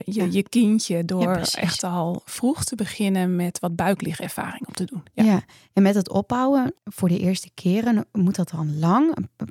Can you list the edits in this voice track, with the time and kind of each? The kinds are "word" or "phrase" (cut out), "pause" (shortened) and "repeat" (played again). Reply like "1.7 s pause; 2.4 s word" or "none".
6.8 s pause